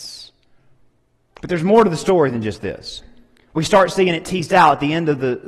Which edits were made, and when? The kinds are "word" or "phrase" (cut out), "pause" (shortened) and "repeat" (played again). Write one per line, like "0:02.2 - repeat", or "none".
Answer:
none